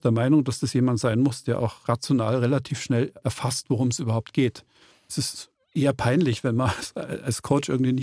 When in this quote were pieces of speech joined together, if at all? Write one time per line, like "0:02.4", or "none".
none

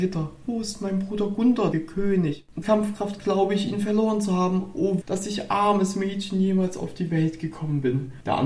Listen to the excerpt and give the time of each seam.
0:01.7
0:02.6
0:05.0

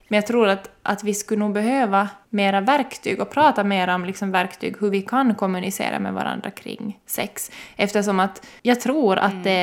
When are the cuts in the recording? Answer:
0:02.2

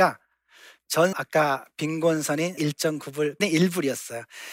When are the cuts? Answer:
0:01.1
0:02.6
0:03.4

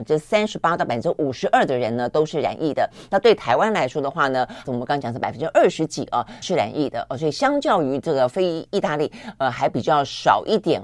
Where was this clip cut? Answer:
0:04.6
0:06.4

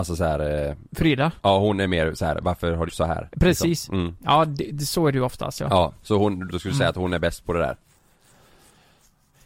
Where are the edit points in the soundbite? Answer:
0:01.4
0:02.9
0:06.5

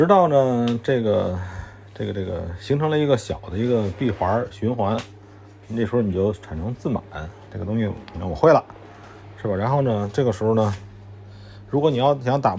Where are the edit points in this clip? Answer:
0:07.5

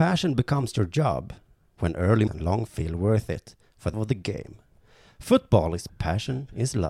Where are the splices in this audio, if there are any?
0:02.3
0:02.7
0:03.9
0:05.9

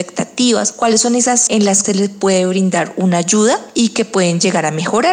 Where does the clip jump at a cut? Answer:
0:01.5
0:01.8

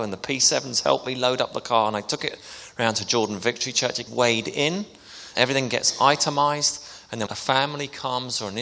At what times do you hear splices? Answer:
0:04.1
0:05.3
0:07.3

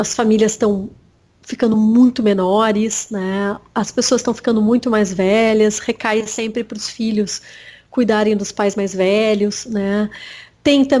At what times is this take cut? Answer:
none

